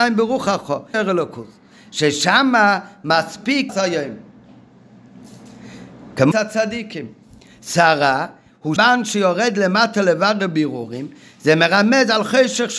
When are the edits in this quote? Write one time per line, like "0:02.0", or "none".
0:00.9
0:03.7
0:06.3
0:08.8